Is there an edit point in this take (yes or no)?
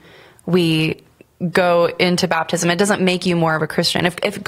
no